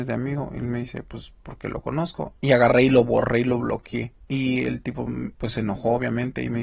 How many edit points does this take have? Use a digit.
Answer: 3